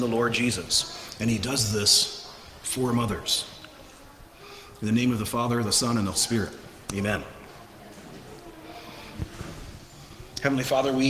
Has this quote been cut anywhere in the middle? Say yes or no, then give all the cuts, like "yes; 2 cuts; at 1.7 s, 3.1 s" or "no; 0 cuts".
yes; 1 cut; at 6.1 s